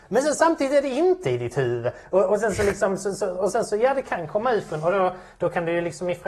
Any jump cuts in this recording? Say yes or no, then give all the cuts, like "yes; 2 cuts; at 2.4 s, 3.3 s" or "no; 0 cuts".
no; 0 cuts